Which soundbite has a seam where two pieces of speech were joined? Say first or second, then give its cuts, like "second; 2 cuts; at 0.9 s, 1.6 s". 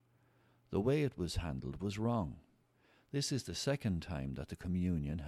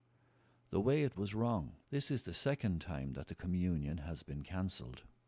second; 2 cuts; at 1.1 s, 1.8 s